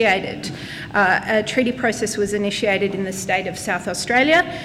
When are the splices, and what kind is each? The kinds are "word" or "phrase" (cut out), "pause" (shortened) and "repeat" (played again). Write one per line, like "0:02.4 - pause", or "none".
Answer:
none